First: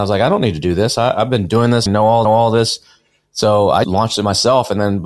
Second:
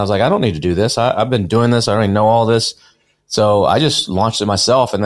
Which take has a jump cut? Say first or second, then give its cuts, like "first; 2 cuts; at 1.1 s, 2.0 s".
first; 3 cuts; at 1.9 s, 2.2 s, 3.8 s